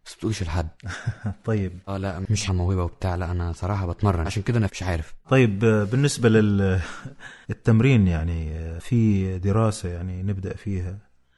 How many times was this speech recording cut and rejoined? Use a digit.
5